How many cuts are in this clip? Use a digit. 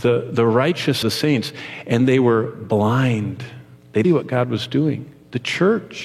2